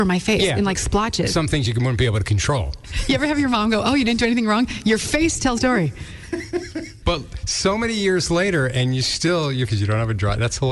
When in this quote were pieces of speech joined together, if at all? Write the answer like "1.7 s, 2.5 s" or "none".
5.6 s, 9.7 s